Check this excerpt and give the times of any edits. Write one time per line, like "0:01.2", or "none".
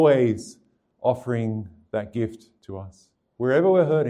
0:02.5